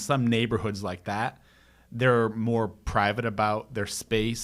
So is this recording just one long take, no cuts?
yes; 0 cuts

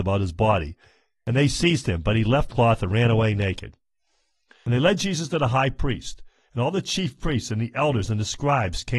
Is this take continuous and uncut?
no; 1 cut; at 2.5 s

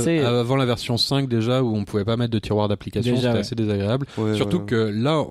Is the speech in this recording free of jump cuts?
yes; 0 cuts

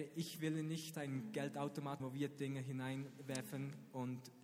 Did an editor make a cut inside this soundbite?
yes; 2 cuts; at 0.9 s, 2.0 s

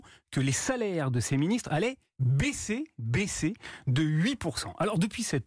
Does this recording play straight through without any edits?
yes; 0 cuts

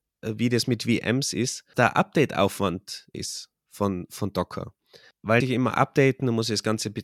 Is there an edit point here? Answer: yes; 3 cuts; at 1.7 s, 3.1 s, 5.4 s

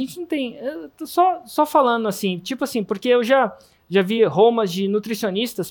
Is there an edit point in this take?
no; 0 cuts

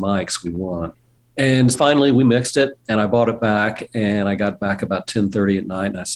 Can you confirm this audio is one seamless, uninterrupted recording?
no; 1 cut; at 1.7 s

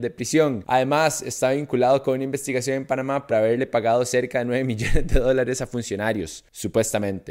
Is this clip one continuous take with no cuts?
no; 1 cut; at 3.3 s

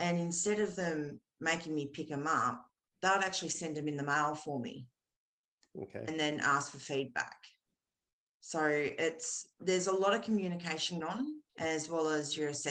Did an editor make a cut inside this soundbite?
yes; 3 cuts; at 9.5 s, 11.0 s, 11.5 s

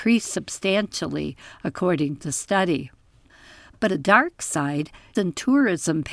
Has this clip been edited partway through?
yes; 3 cuts; at 2.2 s, 3.9 s, 5.1 s

